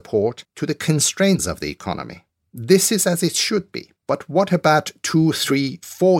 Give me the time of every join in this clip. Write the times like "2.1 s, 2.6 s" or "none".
1.4 s, 4.0 s